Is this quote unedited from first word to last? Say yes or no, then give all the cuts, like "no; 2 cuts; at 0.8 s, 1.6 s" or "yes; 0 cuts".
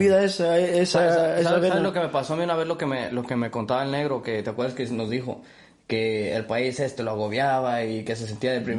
yes; 0 cuts